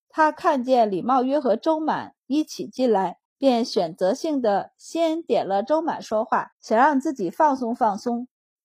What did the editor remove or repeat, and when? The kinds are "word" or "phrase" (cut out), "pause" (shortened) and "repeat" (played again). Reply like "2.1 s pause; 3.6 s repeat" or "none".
3.3 s pause; 6.5 s pause